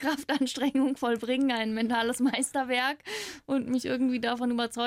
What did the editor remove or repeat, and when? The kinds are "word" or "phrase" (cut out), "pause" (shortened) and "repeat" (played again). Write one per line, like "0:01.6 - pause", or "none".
none